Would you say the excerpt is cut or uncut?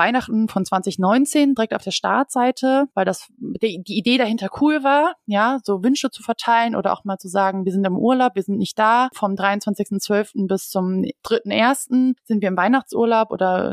cut